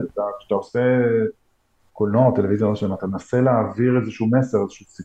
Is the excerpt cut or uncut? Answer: uncut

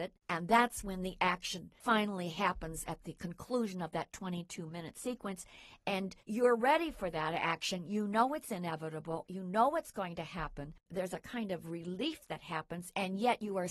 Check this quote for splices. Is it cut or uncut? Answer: cut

